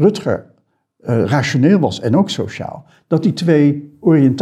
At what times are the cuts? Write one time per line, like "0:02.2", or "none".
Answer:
none